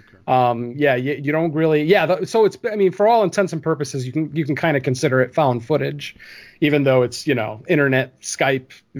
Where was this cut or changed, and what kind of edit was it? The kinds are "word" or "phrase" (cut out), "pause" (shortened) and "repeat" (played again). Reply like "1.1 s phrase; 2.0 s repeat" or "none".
none